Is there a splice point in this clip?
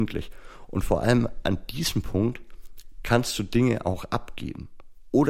no; 0 cuts

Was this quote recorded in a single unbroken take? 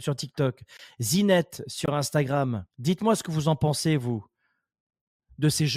no; 1 cut; at 2.7 s

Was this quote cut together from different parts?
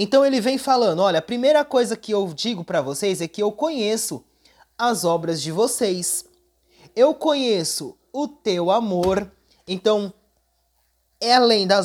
no; 0 cuts

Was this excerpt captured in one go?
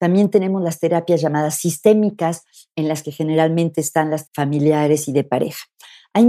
no; 1 cut; at 4.3 s

